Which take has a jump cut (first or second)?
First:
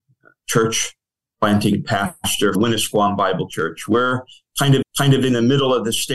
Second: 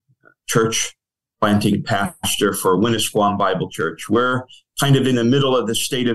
first